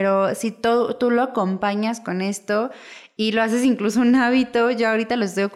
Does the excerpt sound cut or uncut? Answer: uncut